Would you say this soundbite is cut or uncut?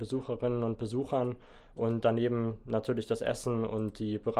uncut